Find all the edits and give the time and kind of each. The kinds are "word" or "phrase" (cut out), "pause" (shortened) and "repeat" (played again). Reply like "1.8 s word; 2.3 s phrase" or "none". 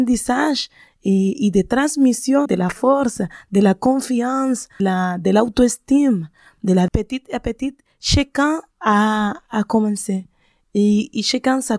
2.5 s word; 4.8 s word; 6.9 s phrase; 8.7 s pause